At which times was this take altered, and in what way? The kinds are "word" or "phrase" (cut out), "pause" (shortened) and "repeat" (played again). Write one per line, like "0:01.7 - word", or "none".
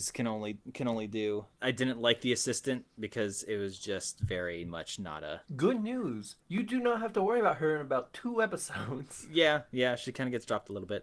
0:01.5 - pause
0:05.4 - pause
0:06.4 - pause